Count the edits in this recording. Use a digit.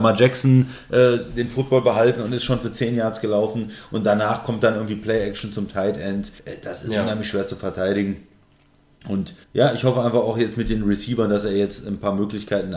2